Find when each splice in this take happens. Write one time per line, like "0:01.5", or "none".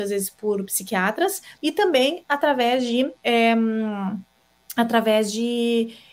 0:01.6
0:03.2